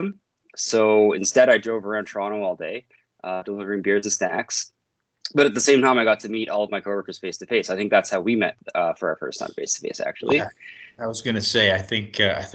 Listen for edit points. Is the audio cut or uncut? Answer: uncut